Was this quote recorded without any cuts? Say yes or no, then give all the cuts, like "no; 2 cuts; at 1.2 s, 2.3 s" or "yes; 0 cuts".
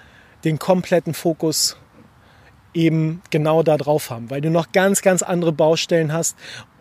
yes; 0 cuts